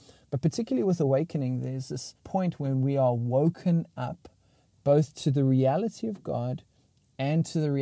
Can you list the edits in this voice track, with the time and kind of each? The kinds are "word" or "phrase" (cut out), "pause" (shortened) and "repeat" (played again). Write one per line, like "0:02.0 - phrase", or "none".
0:02.2 - pause